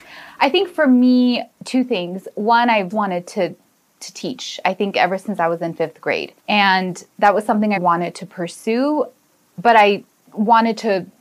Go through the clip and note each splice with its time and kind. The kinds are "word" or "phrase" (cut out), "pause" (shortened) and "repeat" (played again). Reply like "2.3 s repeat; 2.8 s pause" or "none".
1.5 s pause; 2.9 s word; 6.4 s pause; 7.8 s word

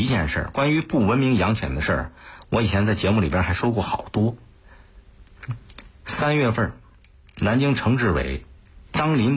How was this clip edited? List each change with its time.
none

